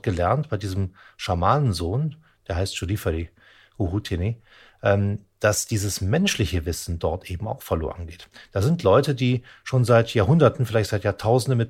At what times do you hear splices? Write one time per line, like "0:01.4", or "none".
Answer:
none